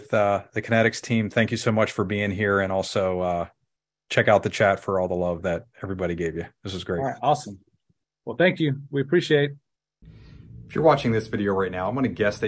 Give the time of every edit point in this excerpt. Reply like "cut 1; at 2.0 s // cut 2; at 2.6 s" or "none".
none